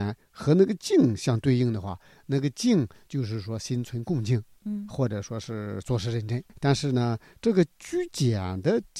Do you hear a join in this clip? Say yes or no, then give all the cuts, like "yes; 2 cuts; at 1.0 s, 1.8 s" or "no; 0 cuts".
no; 0 cuts